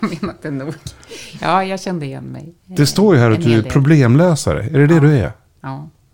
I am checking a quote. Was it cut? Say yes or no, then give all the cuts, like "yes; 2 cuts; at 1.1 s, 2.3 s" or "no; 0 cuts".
yes; 1 cut; at 2.6 s